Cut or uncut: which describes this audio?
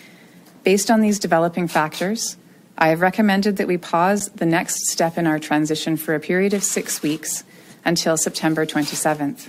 uncut